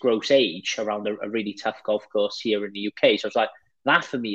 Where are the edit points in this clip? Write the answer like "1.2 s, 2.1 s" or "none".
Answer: none